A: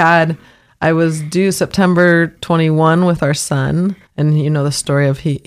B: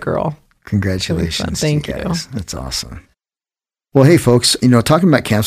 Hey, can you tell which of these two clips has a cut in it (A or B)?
A